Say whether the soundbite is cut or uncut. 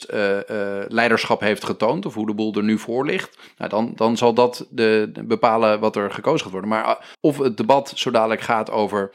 cut